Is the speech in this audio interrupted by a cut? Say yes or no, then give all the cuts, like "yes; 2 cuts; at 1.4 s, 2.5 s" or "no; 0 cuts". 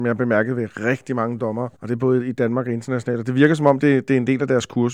yes; 1 cut; at 1.7 s